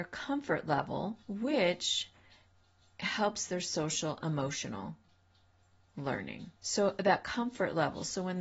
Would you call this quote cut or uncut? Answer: cut